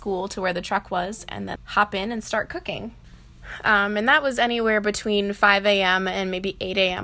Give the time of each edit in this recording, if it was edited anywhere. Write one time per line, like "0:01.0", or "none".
0:01.6